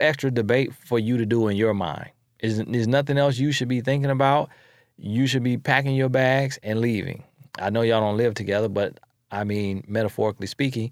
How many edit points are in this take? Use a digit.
0